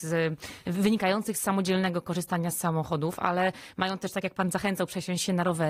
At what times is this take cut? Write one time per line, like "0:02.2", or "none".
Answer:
none